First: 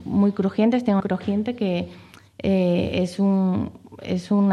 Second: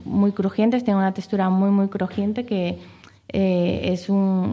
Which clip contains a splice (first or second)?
first